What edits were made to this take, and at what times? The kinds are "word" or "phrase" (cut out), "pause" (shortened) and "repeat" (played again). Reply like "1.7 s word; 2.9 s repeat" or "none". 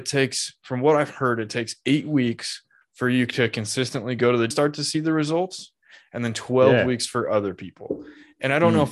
4.5 s phrase